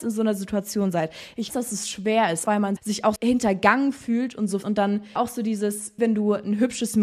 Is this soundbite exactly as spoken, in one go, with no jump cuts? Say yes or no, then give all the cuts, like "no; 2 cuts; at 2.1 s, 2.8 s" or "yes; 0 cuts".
no; 7 cuts; at 1.5 s, 2.4 s, 2.8 s, 3.2 s, 4.6 s, 5.2 s, 6.0 s